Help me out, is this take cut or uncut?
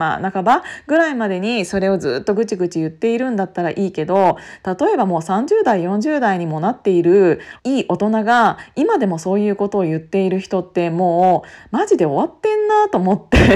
cut